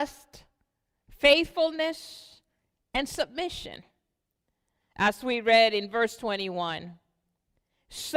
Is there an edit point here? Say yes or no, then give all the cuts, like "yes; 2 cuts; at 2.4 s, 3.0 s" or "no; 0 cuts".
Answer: no; 0 cuts